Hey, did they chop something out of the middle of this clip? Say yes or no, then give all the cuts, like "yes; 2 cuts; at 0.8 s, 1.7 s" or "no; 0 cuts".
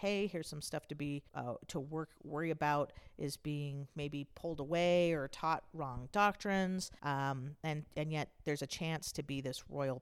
yes; 2 cuts; at 1.3 s, 7.0 s